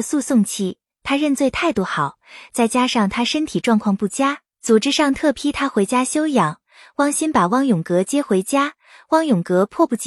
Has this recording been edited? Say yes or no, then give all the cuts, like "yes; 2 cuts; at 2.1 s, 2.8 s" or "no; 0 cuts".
no; 0 cuts